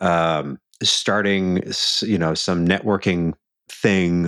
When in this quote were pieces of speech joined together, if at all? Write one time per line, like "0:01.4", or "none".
none